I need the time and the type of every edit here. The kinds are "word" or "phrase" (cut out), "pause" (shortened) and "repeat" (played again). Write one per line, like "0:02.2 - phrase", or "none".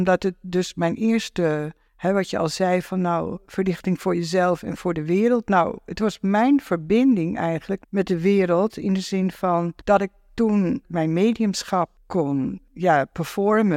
0:07.8 - word
0:10.8 - phrase

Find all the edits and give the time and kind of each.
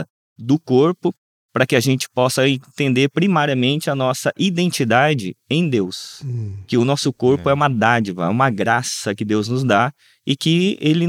none

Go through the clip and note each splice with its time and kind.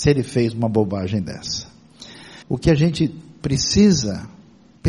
0:02.4 - pause

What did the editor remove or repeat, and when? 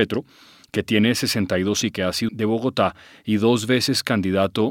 0:01.8 - word
0:02.3 - word

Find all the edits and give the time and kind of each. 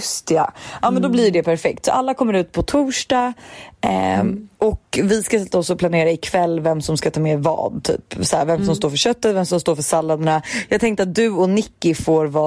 0:04.5 - pause

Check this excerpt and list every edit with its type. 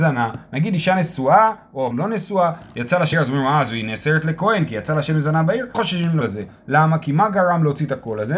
0:01.9 - word
0:03.1 - phrase
0:05.7 - word
0:06.2 - word

